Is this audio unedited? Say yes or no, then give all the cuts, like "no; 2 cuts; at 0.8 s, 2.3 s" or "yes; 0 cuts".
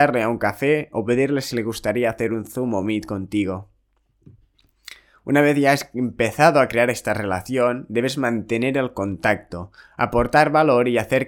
yes; 0 cuts